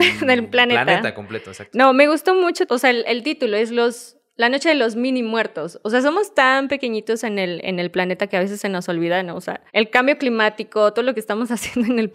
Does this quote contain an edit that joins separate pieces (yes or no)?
yes